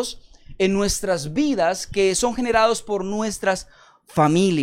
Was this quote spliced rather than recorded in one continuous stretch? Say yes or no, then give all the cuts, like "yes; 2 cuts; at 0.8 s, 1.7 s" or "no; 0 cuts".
no; 0 cuts